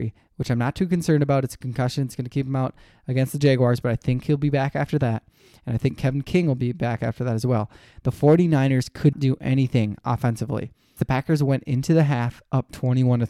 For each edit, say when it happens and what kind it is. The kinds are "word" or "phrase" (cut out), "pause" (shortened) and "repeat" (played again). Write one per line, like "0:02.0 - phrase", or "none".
0:09.1 - word
0:11.0 - word